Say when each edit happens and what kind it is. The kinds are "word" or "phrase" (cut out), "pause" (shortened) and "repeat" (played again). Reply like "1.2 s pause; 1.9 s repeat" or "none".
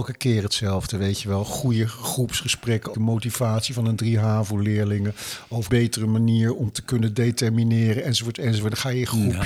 2.9 s phrase; 5.7 s word